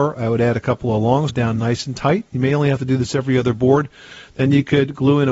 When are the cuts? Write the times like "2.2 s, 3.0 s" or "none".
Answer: 1.3 s